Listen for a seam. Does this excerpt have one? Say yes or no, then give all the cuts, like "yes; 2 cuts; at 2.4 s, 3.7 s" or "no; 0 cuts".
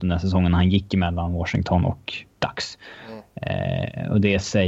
no; 0 cuts